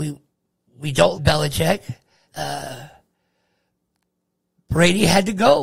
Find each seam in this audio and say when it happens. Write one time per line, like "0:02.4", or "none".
0:01.1
0:02.3